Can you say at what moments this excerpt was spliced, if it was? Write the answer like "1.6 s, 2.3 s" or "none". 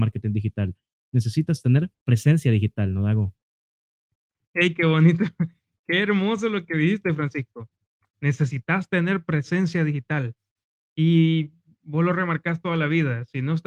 none